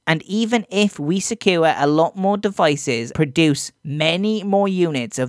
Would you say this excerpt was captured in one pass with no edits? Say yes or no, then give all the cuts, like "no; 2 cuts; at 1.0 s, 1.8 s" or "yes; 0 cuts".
no; 1 cut; at 3.1 s